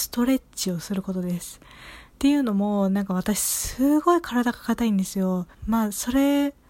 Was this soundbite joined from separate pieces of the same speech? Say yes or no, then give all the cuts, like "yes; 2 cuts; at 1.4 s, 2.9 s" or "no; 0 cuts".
yes; 2 cuts; at 2.1 s, 5.5 s